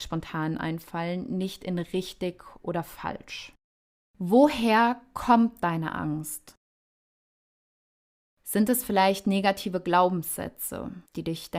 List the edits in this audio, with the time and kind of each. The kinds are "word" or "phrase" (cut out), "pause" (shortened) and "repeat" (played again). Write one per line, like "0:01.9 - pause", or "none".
none